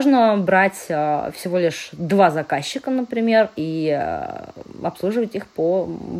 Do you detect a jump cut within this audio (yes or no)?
no